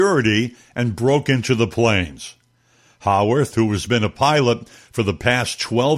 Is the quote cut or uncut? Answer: uncut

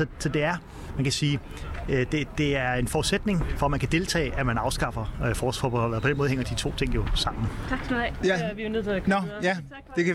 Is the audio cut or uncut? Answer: uncut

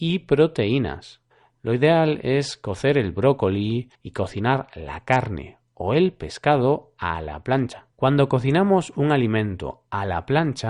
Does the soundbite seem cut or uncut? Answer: cut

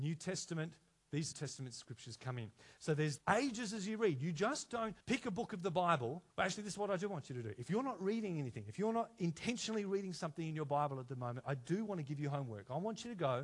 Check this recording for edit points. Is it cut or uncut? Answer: cut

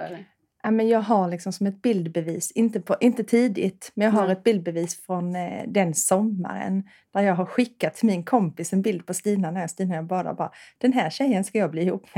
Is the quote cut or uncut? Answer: uncut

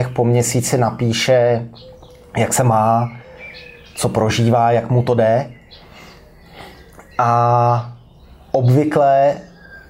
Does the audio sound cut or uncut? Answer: uncut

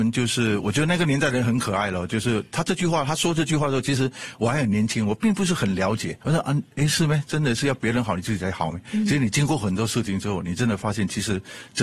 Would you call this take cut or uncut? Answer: cut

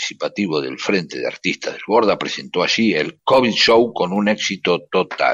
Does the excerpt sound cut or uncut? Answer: uncut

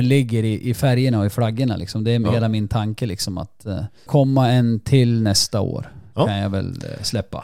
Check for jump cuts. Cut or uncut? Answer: cut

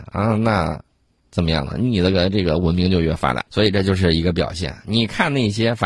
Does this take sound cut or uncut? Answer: cut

